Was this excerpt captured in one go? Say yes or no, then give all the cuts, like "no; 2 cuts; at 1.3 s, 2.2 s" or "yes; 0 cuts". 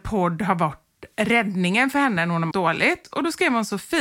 no; 1 cut; at 2.5 s